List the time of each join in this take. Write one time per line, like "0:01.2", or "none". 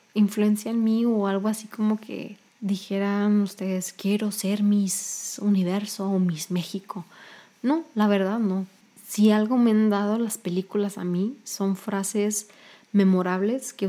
0:02.5